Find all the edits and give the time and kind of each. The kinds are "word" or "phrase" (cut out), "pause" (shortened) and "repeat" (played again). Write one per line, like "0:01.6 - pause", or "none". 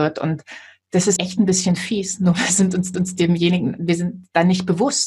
0:01.2 - word
0:02.9 - repeat